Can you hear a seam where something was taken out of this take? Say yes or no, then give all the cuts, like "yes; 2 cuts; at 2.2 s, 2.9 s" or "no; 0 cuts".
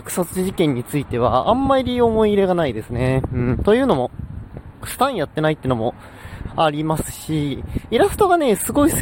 yes; 1 cut; at 4.8 s